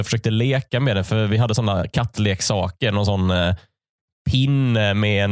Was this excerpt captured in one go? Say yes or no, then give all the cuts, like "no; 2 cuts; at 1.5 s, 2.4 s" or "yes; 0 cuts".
yes; 0 cuts